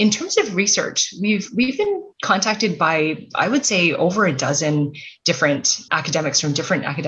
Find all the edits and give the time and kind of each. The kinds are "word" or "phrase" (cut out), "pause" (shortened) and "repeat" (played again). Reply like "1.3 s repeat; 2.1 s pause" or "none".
2.1 s pause; 5.9 s word